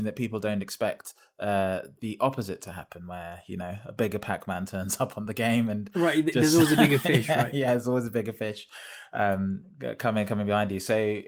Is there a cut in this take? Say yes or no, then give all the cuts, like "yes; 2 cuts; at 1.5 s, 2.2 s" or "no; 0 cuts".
no; 0 cuts